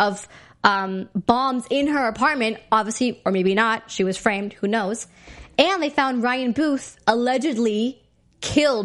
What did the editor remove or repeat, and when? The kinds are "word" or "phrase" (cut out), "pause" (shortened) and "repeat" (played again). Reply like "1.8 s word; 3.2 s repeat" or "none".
none